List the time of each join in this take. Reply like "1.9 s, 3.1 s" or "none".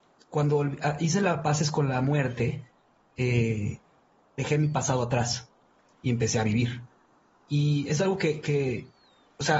none